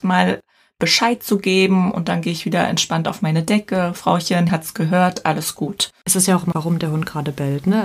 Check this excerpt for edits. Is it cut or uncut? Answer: cut